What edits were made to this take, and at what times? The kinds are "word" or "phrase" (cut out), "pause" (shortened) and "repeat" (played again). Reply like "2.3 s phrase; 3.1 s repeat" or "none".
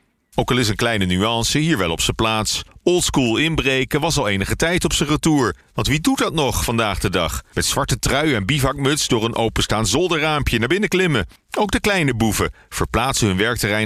none